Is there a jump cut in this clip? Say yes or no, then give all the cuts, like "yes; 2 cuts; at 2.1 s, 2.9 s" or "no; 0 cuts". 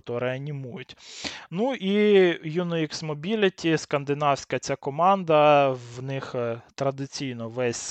no; 0 cuts